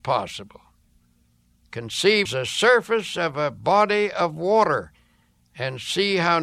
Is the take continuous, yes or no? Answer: no